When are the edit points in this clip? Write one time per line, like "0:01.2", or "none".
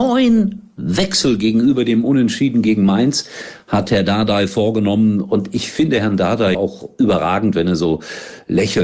0:06.5